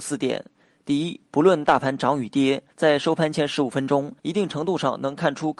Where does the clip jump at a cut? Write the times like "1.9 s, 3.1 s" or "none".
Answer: 2.7 s, 4.2 s